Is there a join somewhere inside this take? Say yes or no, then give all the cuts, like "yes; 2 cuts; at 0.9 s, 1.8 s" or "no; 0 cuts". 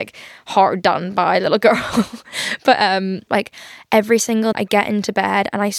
yes; 2 cuts; at 3.3 s, 4.5 s